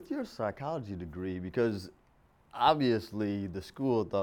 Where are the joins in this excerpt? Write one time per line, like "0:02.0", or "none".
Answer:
none